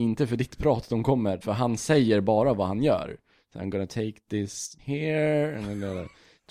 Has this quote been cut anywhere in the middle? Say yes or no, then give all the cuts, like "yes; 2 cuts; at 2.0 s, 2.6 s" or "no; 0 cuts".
yes; 2 cuts; at 1.4 s, 4.8 s